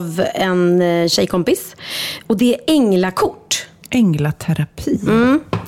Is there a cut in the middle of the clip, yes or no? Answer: no